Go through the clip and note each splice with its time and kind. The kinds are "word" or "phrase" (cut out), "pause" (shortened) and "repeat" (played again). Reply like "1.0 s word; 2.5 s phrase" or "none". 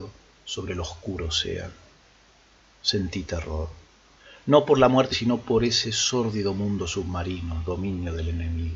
5.1 s word

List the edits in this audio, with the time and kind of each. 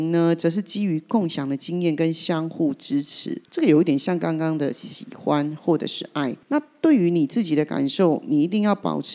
3.4 s pause; 6.4 s pause

